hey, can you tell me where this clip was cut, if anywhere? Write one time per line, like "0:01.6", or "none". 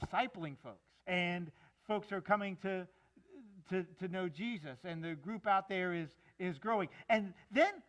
0:01.0